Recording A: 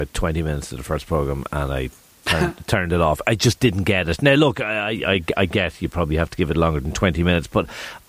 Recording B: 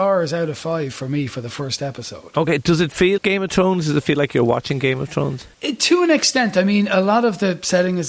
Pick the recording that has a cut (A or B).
B